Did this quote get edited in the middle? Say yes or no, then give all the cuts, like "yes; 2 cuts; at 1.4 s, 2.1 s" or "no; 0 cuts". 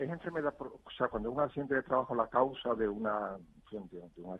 no; 0 cuts